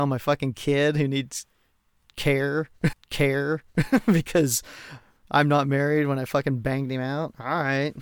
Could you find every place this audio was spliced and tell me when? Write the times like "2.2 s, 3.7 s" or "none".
2.9 s